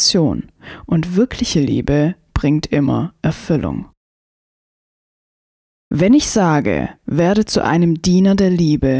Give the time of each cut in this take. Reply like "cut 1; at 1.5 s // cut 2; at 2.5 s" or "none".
none